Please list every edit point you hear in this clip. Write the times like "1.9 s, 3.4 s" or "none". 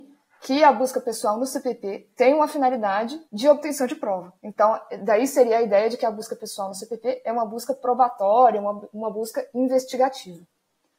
2.1 s, 3.2 s, 4.4 s